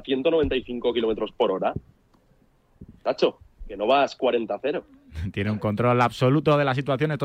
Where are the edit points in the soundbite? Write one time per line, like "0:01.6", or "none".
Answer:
0:03.0